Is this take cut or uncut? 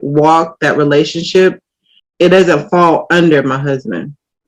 cut